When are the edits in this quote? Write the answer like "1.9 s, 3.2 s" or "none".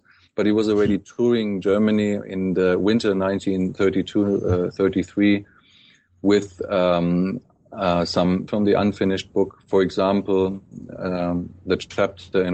8.5 s